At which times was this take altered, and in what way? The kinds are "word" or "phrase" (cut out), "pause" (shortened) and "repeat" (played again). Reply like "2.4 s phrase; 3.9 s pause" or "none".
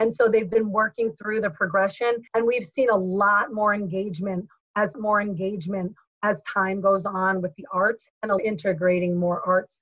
2.3 s pause; 4.9 s repeat; 8.4 s phrase